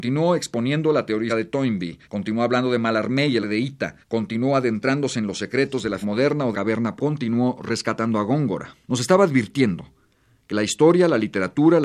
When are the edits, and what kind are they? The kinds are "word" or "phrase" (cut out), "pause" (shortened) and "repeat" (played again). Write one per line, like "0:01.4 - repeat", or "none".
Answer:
0:01.3 - word
0:02.0 - pause
0:03.4 - word
0:04.0 - pause
0:06.0 - word
0:06.5 - phrase
0:07.0 - word
0:08.8 - pause